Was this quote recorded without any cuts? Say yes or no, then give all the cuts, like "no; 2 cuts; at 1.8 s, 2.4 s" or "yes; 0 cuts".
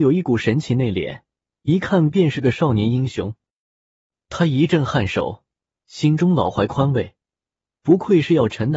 yes; 0 cuts